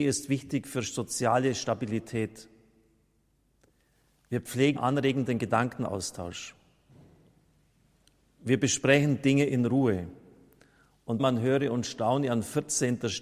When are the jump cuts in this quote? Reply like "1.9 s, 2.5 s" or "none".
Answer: 4.8 s, 11.2 s